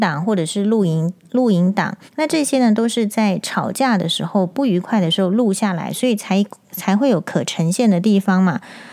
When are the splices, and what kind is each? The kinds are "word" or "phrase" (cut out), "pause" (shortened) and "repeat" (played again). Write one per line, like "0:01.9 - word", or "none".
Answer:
0:02.1 - pause